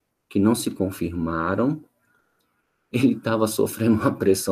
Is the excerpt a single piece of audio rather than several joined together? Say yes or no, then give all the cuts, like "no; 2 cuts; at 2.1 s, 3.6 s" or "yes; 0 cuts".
yes; 0 cuts